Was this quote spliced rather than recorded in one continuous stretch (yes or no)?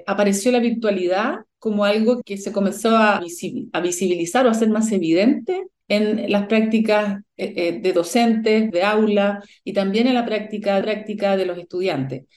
yes